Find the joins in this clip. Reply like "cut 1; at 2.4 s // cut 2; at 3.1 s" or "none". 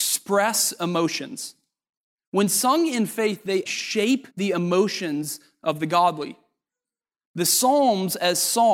cut 1; at 3.7 s // cut 2; at 4.3 s